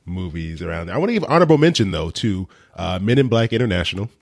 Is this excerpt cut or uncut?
uncut